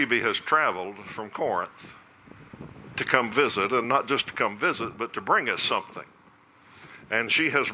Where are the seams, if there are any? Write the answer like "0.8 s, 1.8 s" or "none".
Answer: none